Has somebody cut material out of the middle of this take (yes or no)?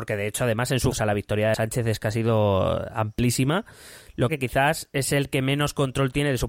yes